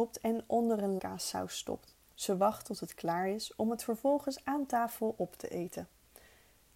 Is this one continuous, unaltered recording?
no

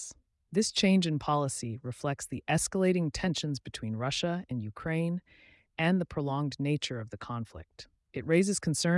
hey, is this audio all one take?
yes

